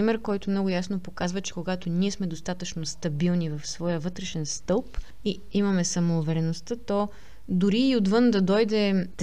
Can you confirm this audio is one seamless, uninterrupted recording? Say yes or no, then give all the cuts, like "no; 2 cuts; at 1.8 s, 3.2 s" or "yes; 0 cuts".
yes; 0 cuts